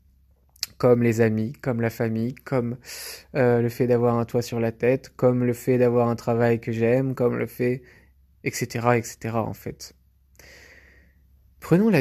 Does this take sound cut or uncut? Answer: uncut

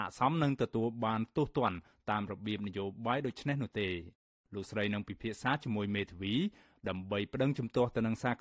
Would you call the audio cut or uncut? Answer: uncut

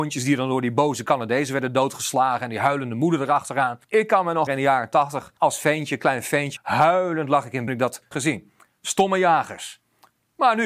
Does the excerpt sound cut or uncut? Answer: cut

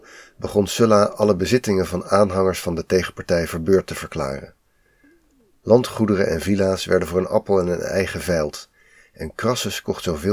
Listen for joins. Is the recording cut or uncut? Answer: uncut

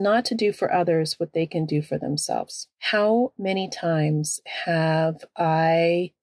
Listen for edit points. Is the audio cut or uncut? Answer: cut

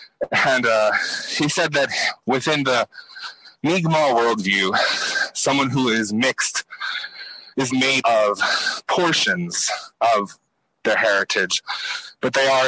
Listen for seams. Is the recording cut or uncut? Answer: cut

